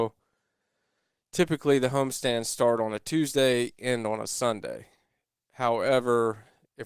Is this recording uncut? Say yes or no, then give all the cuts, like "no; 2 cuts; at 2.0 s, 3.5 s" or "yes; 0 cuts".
yes; 0 cuts